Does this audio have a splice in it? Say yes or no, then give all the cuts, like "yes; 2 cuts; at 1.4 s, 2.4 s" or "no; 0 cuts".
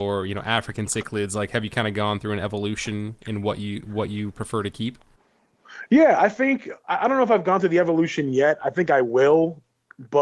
no; 0 cuts